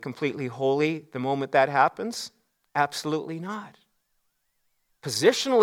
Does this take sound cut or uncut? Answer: uncut